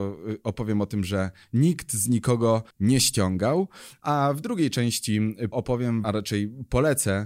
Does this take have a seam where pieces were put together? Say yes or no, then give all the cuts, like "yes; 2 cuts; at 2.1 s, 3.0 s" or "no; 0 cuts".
yes; 3 cuts; at 2.7 s, 5.5 s, 6.0 s